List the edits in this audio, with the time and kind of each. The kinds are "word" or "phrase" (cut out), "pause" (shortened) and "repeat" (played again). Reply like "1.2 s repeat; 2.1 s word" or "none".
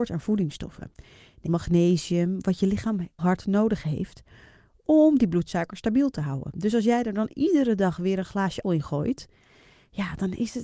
1.5 s word; 3.2 s word; 8.6 s word